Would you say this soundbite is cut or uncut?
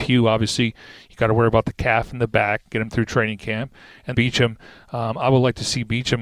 cut